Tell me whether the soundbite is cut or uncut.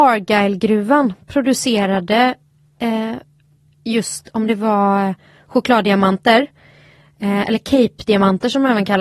uncut